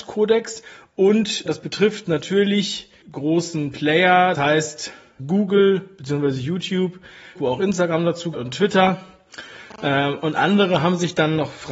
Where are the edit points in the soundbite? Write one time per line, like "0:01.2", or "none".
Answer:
0:01.5
0:03.0
0:04.3
0:05.2
0:07.4
0:08.3